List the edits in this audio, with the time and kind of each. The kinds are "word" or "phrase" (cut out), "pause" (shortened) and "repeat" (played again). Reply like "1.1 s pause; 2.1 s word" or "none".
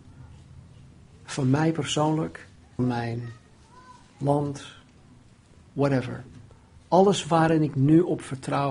2.8 s word